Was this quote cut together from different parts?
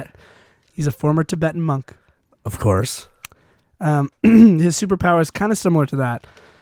no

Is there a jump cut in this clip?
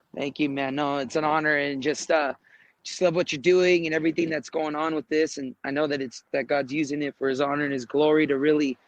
no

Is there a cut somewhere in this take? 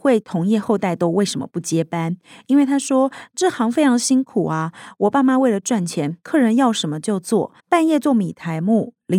yes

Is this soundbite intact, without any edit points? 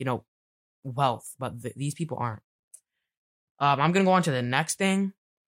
yes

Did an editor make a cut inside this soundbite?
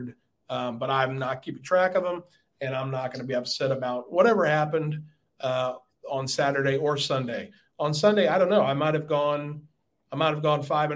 no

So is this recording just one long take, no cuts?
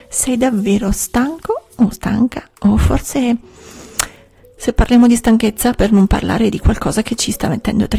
yes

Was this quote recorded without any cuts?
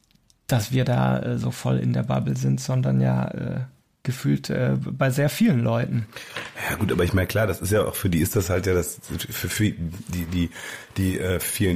yes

